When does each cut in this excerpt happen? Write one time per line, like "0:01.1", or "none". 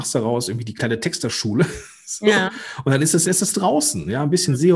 0:03.2